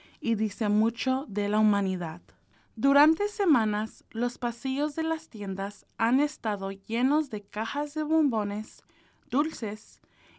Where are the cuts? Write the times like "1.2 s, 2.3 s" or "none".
2.5 s